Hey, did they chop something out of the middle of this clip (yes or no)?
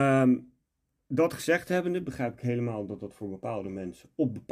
no